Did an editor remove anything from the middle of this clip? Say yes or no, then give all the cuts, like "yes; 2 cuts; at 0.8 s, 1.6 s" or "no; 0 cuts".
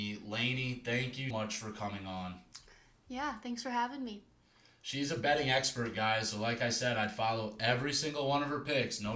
yes; 1 cut; at 1.3 s